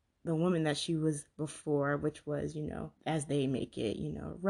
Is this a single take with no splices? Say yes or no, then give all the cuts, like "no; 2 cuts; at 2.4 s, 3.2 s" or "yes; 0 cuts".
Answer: no; 1 cut; at 3.0 s